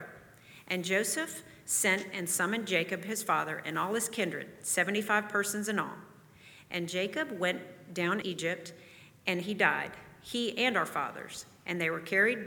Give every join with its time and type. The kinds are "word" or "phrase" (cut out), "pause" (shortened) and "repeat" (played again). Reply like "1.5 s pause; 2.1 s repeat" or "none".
8.2 s word